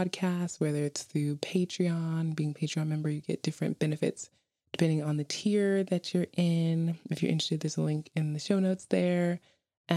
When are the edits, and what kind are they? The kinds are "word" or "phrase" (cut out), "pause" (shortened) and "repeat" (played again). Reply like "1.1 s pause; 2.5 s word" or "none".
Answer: none